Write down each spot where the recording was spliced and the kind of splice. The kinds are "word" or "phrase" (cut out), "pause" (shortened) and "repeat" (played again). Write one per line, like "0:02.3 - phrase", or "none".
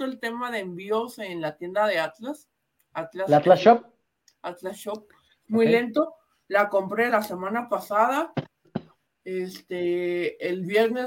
0:07.1 - word